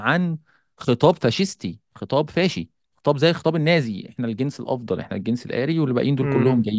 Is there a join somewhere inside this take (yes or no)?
no